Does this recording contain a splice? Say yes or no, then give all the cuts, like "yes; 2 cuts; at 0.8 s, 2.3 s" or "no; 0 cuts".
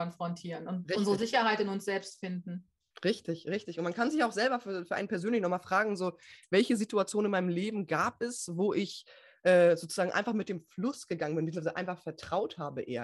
no; 0 cuts